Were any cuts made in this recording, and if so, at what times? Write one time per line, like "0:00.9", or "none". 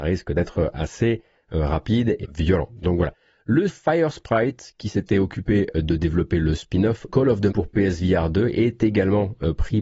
0:02.2
0:03.7
0:07.1
0:07.5